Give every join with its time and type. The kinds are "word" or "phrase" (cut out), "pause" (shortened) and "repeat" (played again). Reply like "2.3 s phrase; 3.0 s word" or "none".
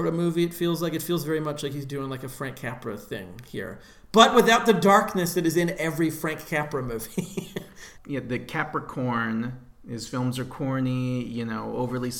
none